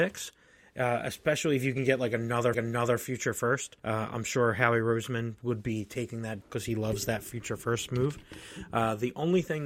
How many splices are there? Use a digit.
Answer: 3